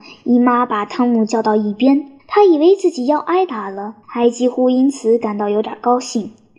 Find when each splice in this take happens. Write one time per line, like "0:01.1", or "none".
0:02.2
0:04.0